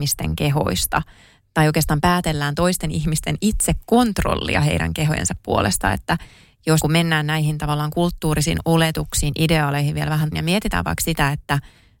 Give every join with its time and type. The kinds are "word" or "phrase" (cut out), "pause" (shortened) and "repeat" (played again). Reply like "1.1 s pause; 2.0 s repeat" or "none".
6.8 s word; 10.3 s word